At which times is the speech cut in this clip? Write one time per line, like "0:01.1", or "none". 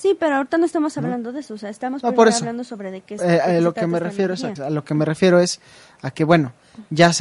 0:04.6